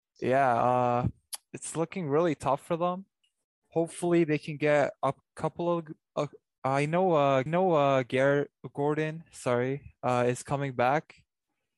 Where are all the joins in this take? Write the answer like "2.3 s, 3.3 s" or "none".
3.2 s, 7.5 s